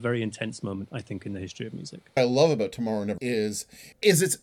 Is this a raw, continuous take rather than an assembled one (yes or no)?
no